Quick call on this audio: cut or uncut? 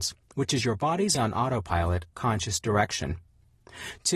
cut